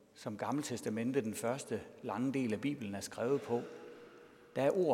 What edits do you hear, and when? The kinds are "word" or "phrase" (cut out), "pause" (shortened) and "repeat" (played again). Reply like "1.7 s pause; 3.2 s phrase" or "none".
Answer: none